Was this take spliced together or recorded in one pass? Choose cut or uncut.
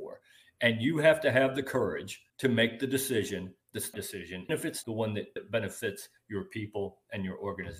cut